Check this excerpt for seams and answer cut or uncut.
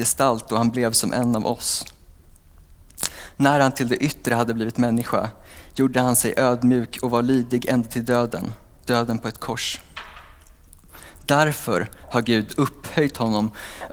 uncut